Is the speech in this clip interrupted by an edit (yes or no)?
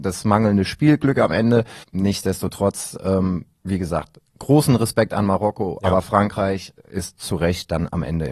yes